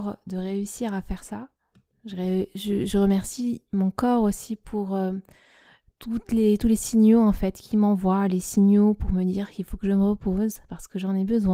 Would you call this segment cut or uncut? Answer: uncut